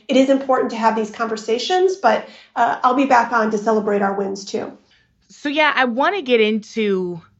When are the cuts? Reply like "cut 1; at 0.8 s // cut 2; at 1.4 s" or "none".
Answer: cut 1; at 4.9 s